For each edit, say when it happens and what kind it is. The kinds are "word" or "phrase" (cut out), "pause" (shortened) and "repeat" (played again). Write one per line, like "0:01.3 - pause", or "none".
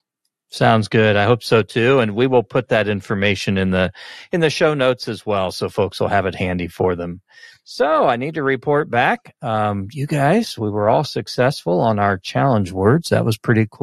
none